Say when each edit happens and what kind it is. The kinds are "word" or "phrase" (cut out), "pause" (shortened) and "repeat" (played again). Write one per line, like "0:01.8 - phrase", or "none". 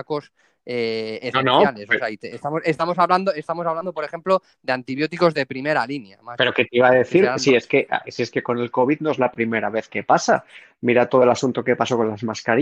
none